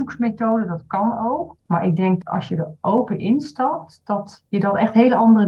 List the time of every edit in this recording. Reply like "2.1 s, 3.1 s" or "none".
1.6 s, 2.2 s, 4.5 s